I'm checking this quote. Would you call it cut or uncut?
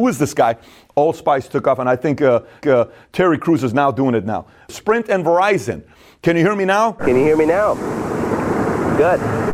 cut